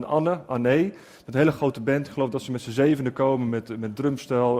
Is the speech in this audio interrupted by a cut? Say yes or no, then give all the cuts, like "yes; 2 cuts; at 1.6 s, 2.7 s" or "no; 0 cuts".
no; 0 cuts